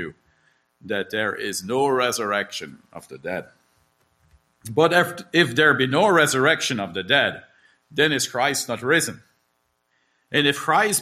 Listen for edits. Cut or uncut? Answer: uncut